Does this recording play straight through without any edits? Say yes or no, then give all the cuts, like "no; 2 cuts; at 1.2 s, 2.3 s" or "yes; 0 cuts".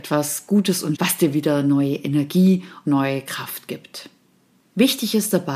no; 2 cuts; at 0.9 s, 2.8 s